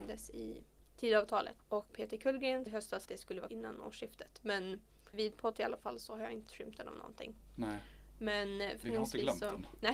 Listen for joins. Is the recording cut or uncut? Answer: cut